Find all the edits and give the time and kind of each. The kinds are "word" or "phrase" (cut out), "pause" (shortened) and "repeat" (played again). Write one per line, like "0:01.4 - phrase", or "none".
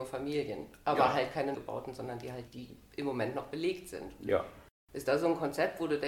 0:01.5 - word
0:02.5 - word

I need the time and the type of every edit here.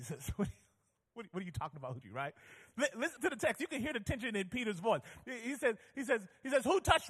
0:02.0 - word
0:03.2 - word

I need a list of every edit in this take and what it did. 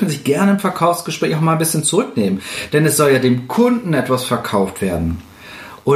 none

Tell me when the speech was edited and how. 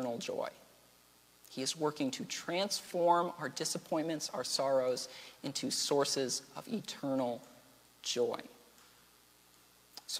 none

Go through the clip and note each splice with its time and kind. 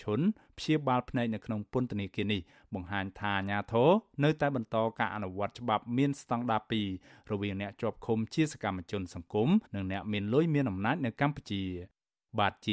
0:09.6 - pause

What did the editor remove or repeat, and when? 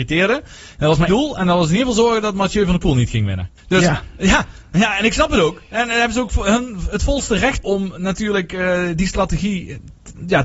0:01.1 - word
0:03.6 - pause
0:07.6 - word

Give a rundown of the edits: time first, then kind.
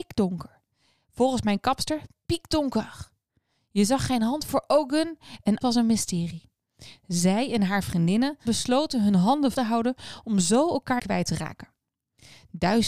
0:05.6 - word
0:08.4 - word
0:09.5 - word
0:11.0 - word

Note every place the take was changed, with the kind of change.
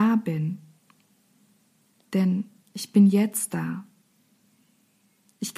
none

